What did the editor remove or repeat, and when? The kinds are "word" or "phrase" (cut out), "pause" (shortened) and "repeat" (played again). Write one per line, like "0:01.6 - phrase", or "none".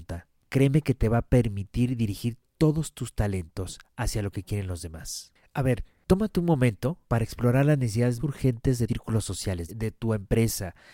0:07.0 - pause
0:08.2 - word
0:08.9 - word
0:09.7 - word